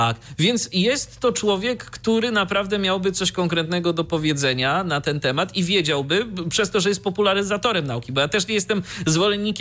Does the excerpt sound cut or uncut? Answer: uncut